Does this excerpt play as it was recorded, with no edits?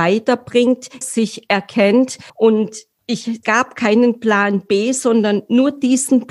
no; 3 cuts; at 1.0 s, 2.3 s, 3.4 s

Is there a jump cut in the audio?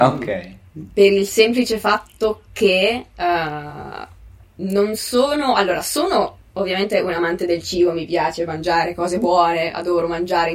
no; 0 cuts

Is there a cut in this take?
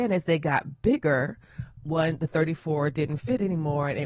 no; 0 cuts

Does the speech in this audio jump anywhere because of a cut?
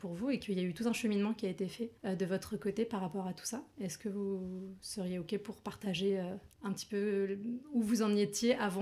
yes; 2 cuts; at 2.0 s, 6.5 s

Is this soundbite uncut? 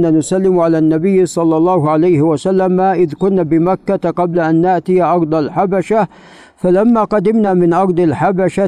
yes; 0 cuts

